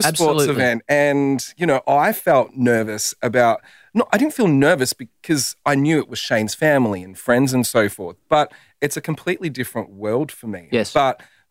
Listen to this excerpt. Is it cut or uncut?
uncut